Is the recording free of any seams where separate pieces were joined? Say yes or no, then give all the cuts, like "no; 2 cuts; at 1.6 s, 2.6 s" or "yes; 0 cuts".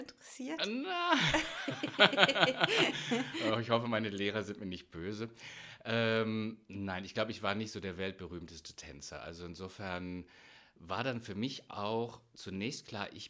yes; 0 cuts